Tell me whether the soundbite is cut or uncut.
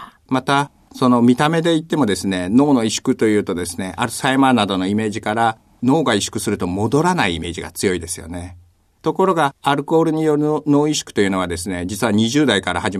uncut